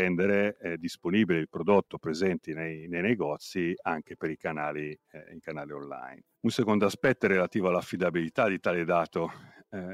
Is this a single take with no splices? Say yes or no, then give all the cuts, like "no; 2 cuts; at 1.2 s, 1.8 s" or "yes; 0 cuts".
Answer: yes; 0 cuts